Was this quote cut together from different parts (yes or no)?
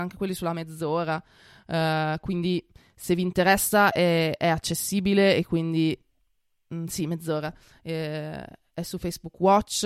no